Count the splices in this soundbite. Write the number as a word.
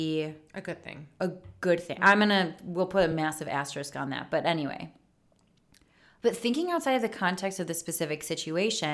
zero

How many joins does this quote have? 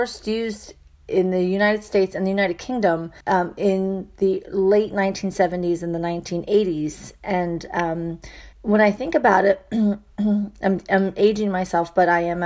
two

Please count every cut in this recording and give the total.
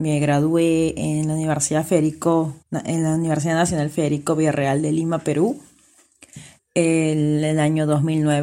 two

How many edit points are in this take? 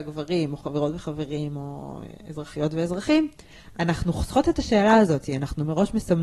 zero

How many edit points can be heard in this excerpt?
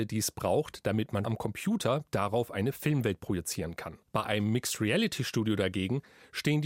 two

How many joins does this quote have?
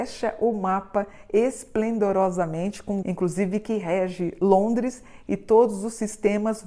one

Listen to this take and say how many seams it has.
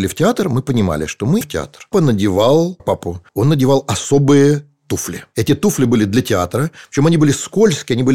four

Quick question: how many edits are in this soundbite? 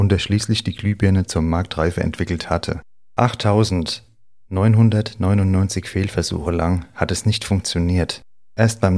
zero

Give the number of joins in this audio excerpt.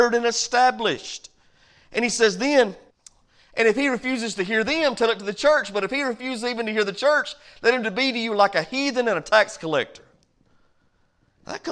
one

